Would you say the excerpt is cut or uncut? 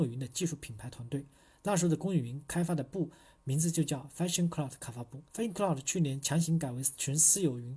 cut